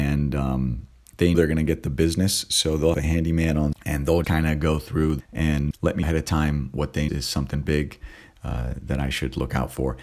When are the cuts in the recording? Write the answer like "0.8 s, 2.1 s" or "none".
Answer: 1.3 s, 2.9 s, 3.7 s, 4.2 s, 5.2 s, 5.7 s, 6.0 s, 7.1 s